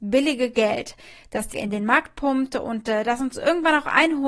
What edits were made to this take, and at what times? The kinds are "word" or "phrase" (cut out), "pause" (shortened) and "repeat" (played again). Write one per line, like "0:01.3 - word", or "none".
0:01.5 - word